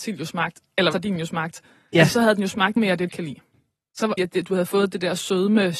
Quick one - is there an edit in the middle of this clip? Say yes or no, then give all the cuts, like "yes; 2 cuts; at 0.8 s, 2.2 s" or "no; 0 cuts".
yes; 4 cuts; at 0.9 s, 2.8 s, 3.1 s, 4.2 s